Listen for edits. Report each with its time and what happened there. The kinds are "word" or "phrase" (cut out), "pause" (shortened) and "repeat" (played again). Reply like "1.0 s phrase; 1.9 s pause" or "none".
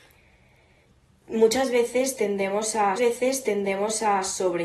3.0 s repeat

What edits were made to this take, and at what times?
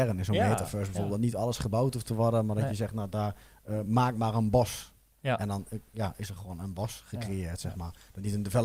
none

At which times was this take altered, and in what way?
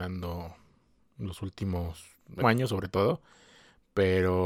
2.4 s word

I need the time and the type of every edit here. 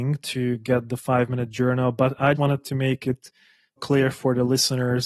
2.4 s word; 3.8 s word

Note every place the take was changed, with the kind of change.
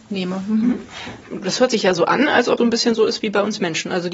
2.6 s word

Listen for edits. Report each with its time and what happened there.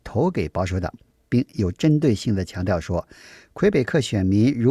none

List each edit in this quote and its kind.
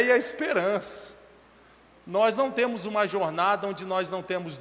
none

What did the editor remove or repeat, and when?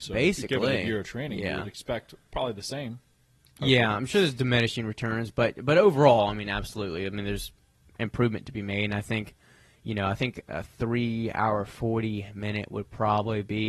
none

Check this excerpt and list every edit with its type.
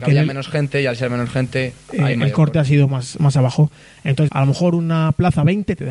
3.2 s word; 4.3 s word

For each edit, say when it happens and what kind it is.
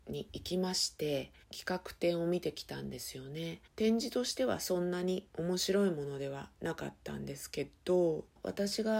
1.4 s pause; 3.7 s pause; 5.3 s pause

